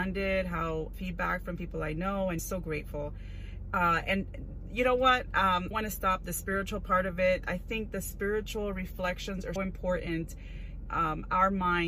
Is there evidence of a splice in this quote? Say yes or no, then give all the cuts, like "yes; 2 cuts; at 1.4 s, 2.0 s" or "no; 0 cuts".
yes; 5 cuts; at 0.9 s, 2.4 s, 5.7 s, 9.6 s, 10.9 s